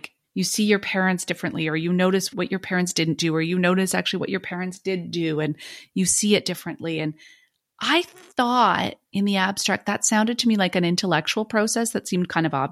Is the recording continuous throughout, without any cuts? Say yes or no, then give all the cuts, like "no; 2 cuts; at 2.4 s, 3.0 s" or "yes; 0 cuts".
yes; 0 cuts